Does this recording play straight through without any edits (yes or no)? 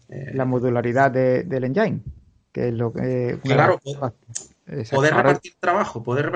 yes